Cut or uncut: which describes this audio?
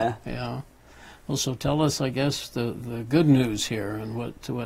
uncut